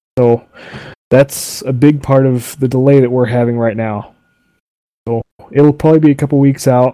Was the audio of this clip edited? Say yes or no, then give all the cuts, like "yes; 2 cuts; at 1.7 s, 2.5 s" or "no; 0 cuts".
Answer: no; 0 cuts